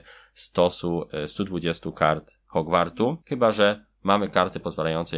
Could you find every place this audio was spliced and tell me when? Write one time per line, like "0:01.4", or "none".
0:03.2

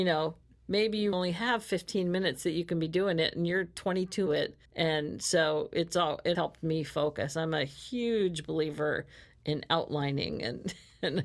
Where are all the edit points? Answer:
0:01.1
0:04.3
0:04.7
0:06.3

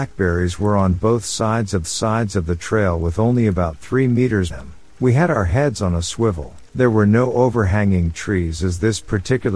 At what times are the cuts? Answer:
0:01.8
0:04.5
0:06.7

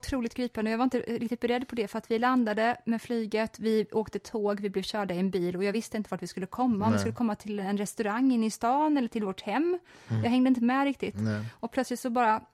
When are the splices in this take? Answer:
none

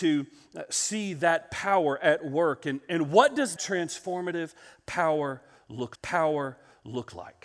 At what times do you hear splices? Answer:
0:03.6
0:05.9

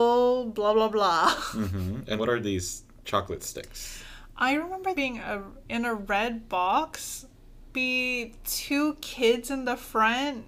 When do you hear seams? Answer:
0:02.2
0:05.0
0:07.7

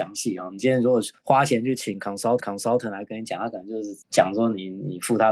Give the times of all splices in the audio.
0:01.2
0:02.4

